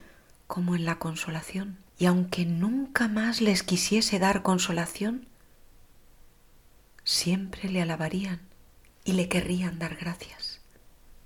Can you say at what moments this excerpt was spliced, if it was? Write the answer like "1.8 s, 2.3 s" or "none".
1.9 s

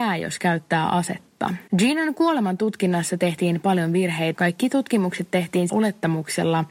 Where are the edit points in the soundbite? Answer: 1.7 s, 4.3 s, 5.7 s

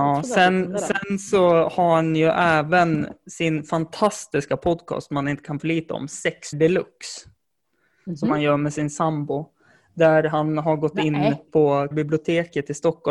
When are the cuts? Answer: 5.6 s, 6.5 s, 11.9 s

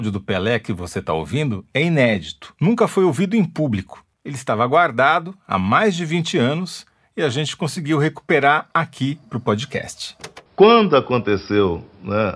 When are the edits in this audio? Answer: 2.6 s, 4.1 s, 10.5 s

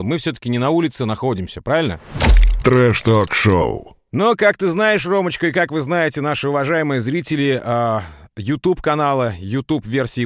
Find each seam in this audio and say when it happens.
none

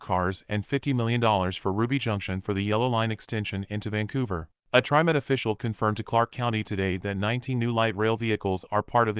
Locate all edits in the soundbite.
4.6 s

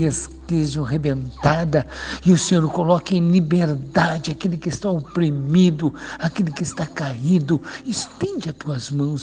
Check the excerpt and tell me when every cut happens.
none

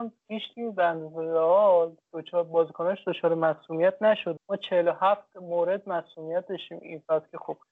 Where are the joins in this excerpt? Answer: 4.4 s

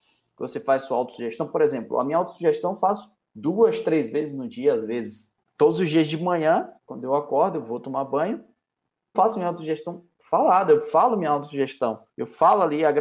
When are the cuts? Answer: 3.1 s, 6.8 s, 9.1 s, 12.1 s

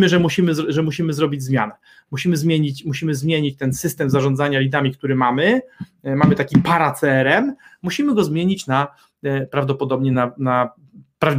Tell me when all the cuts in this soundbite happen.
none

